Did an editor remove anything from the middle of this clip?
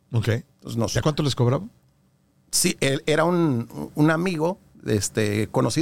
yes; 1 cut; at 1.0 s

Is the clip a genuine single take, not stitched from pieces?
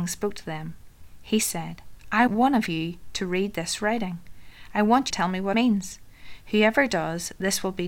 no; 3 cuts; at 2.3 s, 5.1 s, 5.5 s

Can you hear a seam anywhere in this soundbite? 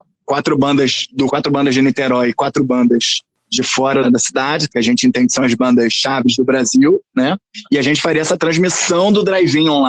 yes; 3 cuts; at 1.3 s, 4.0 s, 4.7 s

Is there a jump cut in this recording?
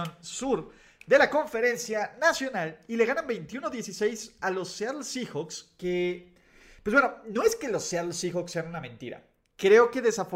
no; 0 cuts

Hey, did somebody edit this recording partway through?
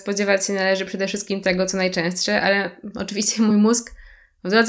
no; 0 cuts

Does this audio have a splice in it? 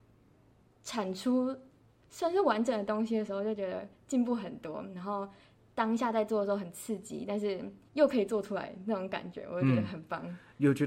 yes; 1 cut; at 7.9 s

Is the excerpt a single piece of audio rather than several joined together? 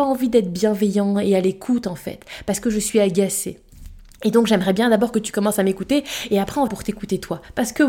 no; 2 cuts; at 4.1 s, 6.7 s

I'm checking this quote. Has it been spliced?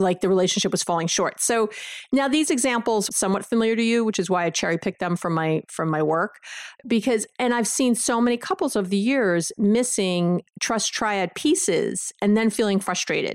yes; 2 cuts; at 3.1 s, 10.5 s

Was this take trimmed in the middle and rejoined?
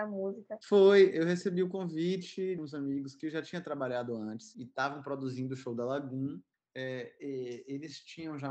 yes; 2 cuts; at 2.6 s, 6.5 s

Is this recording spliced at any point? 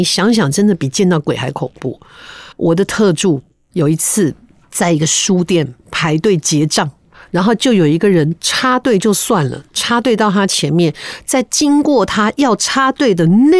yes; 1 cut; at 2.5 s

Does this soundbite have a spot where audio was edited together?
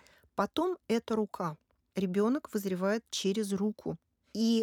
no; 0 cuts

